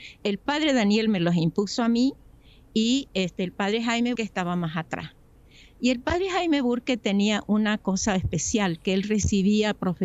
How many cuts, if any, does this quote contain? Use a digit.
1